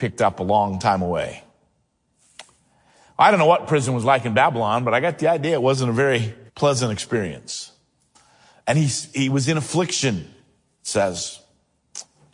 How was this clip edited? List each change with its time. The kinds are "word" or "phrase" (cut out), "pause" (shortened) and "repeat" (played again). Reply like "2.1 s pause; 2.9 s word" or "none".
6.5 s pause